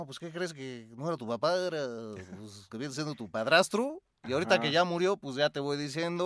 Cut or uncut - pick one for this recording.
cut